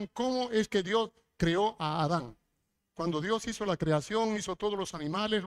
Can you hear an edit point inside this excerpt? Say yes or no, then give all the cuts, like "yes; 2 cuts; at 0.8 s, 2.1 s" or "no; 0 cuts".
no; 0 cuts